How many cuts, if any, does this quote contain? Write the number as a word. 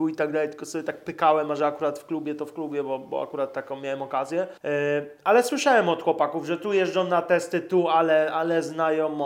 one